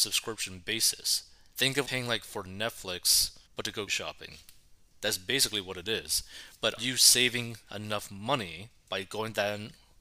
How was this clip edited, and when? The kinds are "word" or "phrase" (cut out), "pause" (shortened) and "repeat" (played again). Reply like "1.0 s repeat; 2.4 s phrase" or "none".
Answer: 1.5 s word; 1.8 s word; 3.5 s pause; 3.9 s word; 4.9 s word; 6.8 s word